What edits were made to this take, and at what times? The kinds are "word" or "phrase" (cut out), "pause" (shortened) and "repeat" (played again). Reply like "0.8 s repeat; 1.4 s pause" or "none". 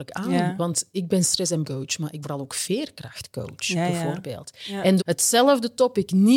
1.6 s word; 2.2 s word; 5.0 s word